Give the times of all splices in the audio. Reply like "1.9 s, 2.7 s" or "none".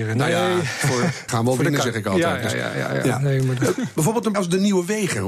1.3 s, 4.3 s